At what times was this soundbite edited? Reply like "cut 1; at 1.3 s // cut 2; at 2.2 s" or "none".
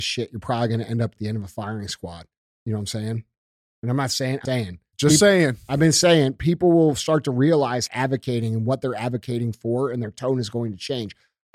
cut 1; at 2.4 s // cut 2; at 4.5 s // cut 3; at 7.9 s